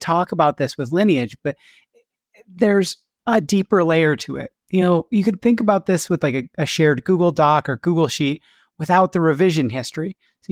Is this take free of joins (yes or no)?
yes